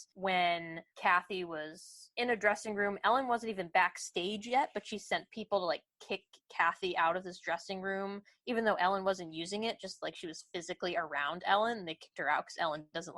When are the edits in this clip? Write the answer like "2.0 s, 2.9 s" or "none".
none